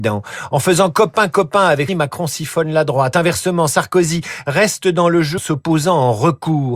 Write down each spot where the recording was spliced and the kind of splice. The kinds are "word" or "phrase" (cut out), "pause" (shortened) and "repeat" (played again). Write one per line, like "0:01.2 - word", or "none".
0:01.9 - word
0:05.4 - word